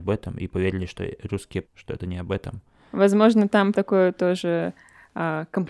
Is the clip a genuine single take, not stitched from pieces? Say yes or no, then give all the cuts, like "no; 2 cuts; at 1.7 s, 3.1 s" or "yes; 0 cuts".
no; 2 cuts; at 1.6 s, 3.7 s